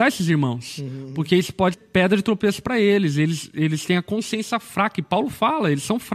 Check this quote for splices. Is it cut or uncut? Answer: cut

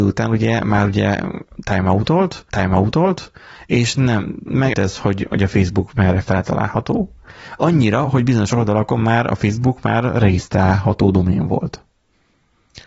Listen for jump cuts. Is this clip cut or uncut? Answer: cut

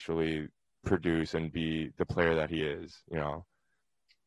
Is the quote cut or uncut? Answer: uncut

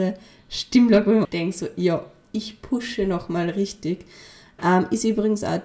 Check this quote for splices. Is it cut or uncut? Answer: cut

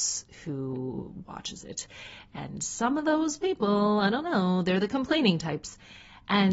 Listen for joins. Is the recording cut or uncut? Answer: uncut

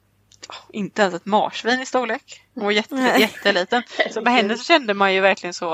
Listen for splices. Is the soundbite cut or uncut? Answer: uncut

